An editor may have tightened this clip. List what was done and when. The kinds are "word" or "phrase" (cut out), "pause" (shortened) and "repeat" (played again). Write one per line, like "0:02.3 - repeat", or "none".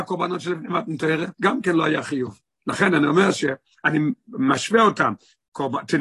0:01.3 - pause